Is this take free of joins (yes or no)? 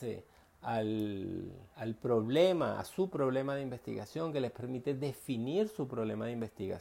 no